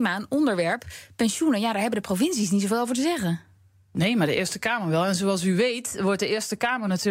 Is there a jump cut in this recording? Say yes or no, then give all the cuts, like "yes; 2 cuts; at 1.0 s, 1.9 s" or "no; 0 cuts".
no; 0 cuts